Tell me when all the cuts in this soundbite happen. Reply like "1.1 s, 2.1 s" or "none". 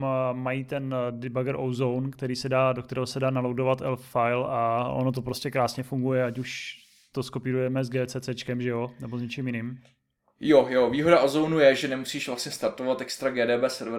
none